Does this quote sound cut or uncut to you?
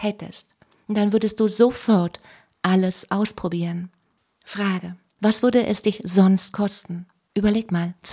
uncut